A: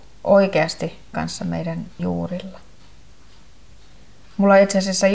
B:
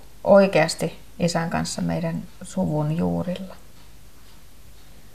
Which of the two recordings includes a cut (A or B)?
A